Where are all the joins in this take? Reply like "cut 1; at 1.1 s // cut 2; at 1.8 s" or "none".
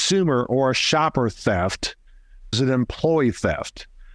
cut 1; at 2.5 s